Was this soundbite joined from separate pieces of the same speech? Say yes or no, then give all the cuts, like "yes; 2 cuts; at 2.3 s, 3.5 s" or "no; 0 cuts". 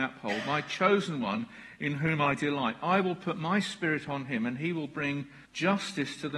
yes; 1 cut; at 5.5 s